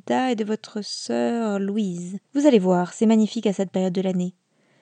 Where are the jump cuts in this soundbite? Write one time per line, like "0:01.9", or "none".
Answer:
0:02.2